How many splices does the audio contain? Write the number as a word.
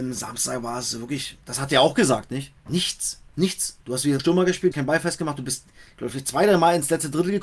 five